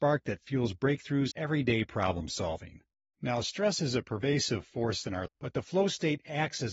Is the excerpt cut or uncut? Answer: cut